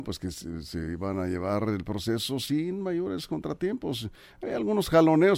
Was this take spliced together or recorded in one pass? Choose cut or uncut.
uncut